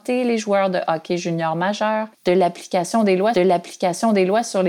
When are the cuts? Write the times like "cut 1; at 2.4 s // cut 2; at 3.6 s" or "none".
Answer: cut 1; at 2.1 s // cut 2; at 3.3 s